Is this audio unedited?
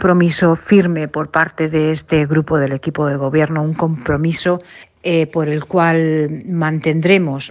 yes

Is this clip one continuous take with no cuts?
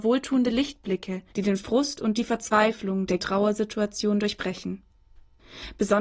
no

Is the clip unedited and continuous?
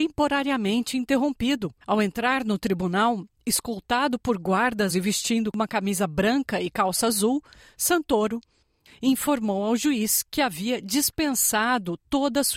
no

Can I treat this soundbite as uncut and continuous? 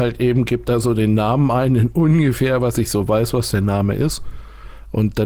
yes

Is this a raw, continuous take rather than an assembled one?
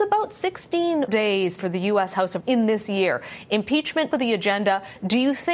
no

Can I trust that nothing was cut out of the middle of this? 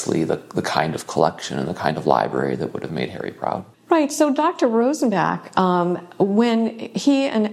no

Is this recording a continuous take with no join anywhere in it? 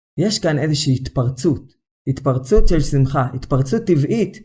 yes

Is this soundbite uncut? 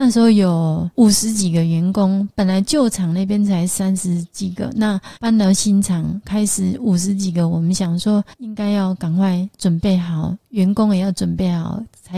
no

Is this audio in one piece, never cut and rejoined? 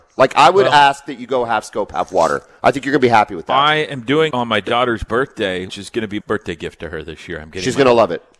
no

